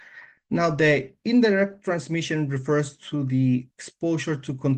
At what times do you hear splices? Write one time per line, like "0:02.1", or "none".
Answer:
0:03.7